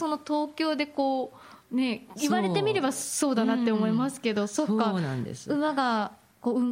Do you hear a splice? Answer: yes; 1 cut; at 1.6 s

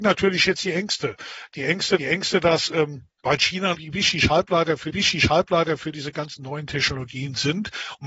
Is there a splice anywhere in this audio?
yes; 4 cuts; at 2.0 s, 3.1 s, 3.7 s, 4.9 s

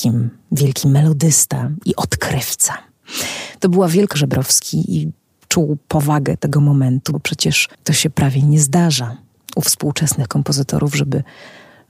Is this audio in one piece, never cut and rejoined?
no; 4 cuts; at 4.1 s, 6.4 s, 7.1 s, 7.7 s

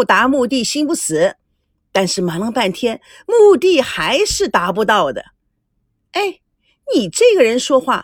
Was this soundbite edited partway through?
no; 0 cuts

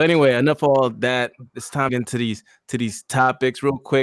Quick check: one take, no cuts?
no; 1 cut; at 1.9 s

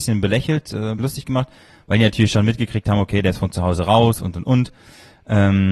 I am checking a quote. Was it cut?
yes; 1 cut; at 1.0 s

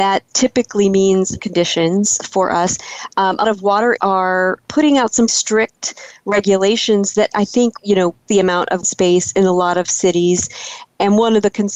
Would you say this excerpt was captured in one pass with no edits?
no; 9 cuts; at 1.4 s, 3.4 s, 4.0 s, 4.6 s, 5.3 s, 7.3 s, 7.8 s, 8.3 s, 8.8 s

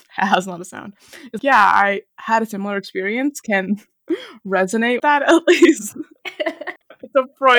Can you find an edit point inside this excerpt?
yes; 2 cuts; at 1.4 s, 5.0 s

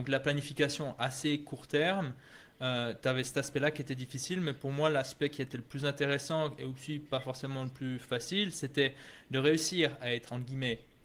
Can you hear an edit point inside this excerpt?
no; 0 cuts

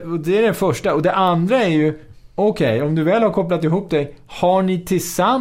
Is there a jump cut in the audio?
no; 0 cuts

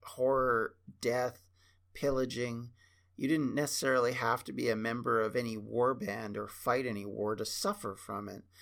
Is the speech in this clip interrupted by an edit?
no; 0 cuts

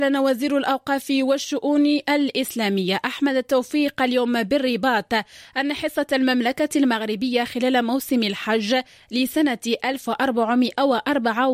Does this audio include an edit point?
no; 0 cuts

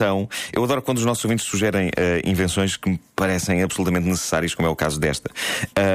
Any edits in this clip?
no; 0 cuts

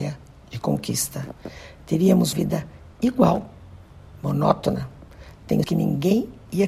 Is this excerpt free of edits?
no; 2 cuts; at 2.3 s, 5.6 s

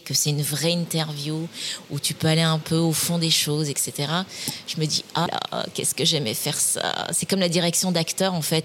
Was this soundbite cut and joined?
yes; 1 cut; at 5.3 s

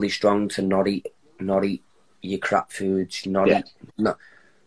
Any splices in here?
no; 0 cuts

